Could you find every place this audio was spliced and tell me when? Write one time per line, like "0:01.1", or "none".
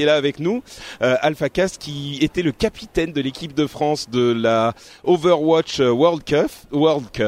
none